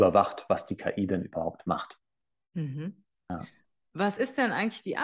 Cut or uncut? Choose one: uncut